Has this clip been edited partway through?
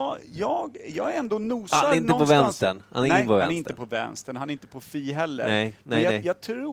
yes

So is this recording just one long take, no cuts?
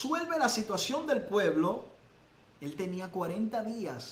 yes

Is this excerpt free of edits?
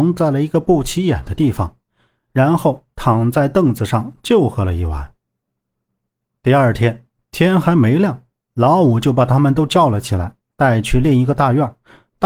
yes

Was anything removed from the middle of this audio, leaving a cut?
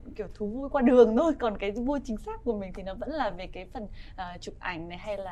no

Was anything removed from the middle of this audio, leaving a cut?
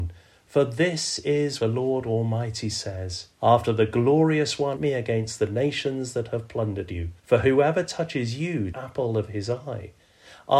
yes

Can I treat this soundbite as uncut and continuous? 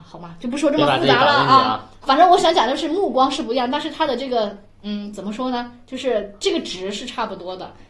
no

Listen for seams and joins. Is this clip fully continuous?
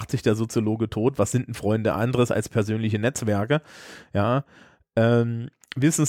yes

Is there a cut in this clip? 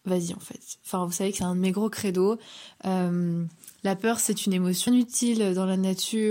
yes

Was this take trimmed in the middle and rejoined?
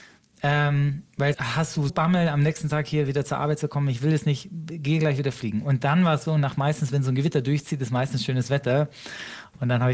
yes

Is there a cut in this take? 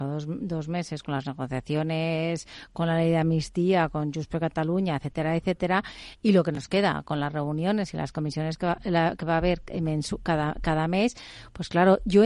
no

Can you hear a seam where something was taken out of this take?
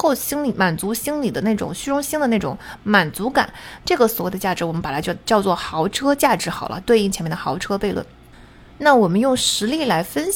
no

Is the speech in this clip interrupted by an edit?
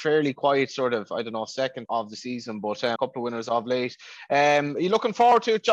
yes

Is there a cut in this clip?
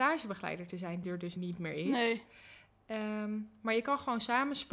yes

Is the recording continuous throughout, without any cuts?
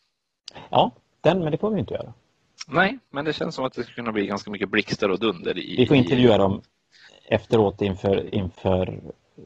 yes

